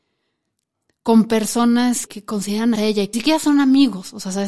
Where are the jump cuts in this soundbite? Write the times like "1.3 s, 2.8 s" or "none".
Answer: 2.1 s, 2.8 s, 3.1 s